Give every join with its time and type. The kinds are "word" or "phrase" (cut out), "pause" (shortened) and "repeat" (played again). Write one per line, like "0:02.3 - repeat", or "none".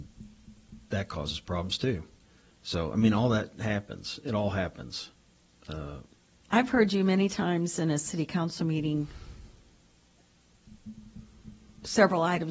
none